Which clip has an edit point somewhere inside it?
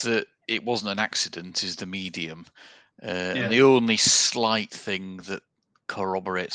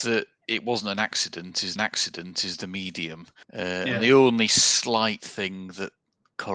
second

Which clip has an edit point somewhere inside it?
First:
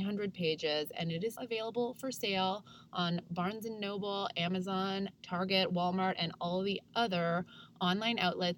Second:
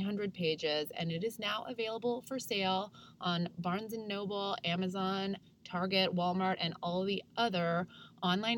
first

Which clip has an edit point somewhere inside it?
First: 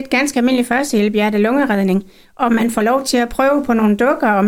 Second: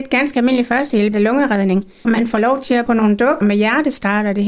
second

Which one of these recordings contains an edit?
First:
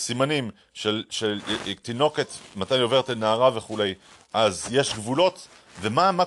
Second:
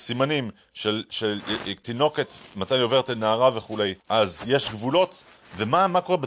second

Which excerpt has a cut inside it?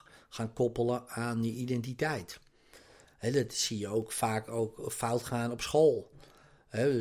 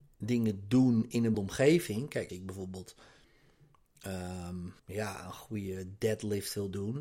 second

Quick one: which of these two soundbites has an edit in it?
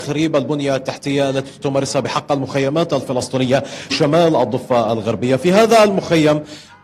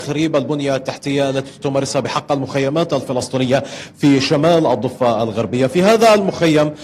first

